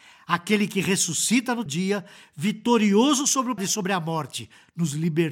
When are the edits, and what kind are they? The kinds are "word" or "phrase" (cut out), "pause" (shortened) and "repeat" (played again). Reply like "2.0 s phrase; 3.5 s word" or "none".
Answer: 1.7 s word; 3.6 s word